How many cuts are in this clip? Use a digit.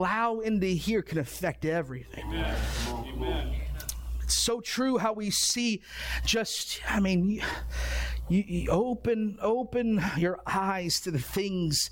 0